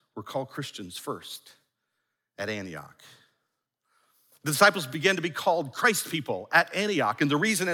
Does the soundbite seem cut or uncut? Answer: uncut